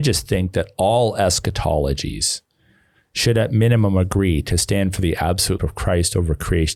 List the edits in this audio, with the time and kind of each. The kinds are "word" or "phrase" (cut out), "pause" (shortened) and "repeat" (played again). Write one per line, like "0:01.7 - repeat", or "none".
0:05.6 - word